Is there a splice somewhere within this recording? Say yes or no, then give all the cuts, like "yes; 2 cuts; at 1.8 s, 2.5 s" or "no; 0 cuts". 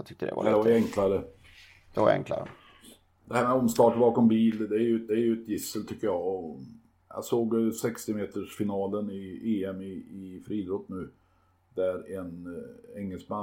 yes; 1 cut; at 5.1 s